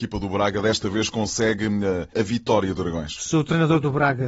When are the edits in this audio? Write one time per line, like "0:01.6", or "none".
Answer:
0:02.1
0:02.8